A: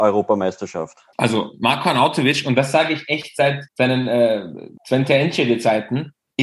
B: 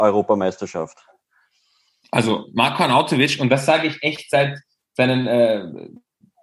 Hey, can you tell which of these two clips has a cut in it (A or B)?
A